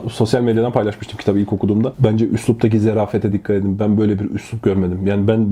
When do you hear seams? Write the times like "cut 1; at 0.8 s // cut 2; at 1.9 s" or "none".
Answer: none